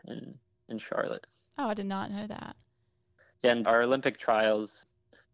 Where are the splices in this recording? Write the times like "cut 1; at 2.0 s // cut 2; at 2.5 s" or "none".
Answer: cut 1; at 3.6 s